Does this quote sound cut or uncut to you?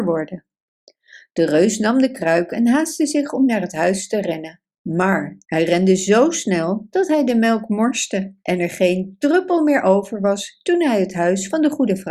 cut